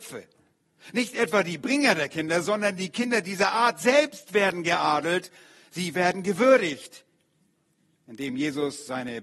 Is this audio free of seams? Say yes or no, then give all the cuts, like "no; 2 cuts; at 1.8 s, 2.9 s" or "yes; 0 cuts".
yes; 0 cuts